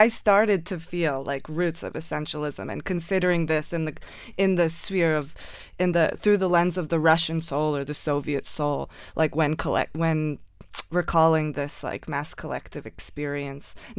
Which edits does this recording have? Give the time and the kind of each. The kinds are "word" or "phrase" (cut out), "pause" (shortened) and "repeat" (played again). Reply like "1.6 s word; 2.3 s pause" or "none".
none